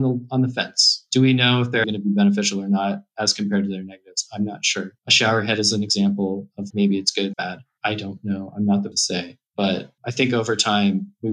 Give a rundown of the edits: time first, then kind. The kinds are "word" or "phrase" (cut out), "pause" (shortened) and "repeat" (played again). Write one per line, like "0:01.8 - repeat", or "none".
0:01.8 - word
0:05.0 - pause
0:06.7 - word
0:07.3 - phrase
0:08.9 - word
0:09.5 - pause